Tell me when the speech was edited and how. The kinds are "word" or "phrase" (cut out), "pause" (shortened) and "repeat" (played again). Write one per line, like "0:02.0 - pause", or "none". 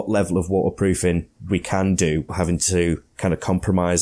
0:02.3 - word
0:03.1 - pause